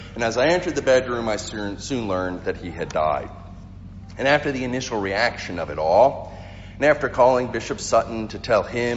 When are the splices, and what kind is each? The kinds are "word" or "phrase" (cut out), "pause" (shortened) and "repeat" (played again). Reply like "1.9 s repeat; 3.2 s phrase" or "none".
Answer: none